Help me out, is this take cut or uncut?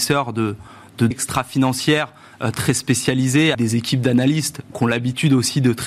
cut